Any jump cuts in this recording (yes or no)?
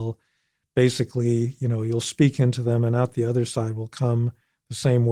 no